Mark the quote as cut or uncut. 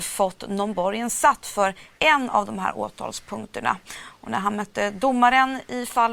uncut